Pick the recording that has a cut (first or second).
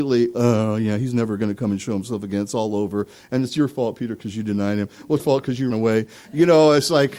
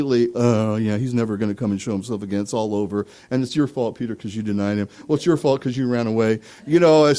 first